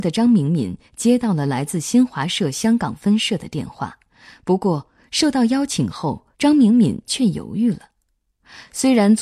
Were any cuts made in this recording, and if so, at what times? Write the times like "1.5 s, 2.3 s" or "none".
4.1 s, 6.3 s